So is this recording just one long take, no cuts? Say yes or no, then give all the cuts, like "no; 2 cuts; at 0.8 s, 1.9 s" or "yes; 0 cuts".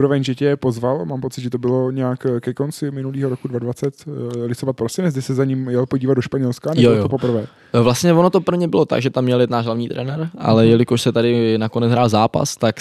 yes; 0 cuts